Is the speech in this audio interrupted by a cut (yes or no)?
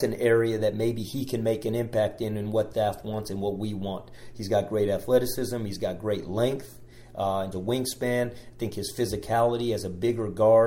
yes